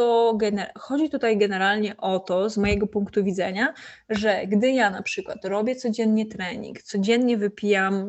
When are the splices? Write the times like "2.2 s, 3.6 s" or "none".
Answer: none